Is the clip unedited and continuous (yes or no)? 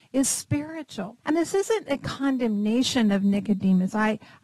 no